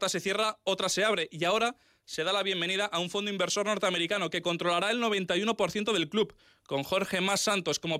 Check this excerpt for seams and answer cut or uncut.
uncut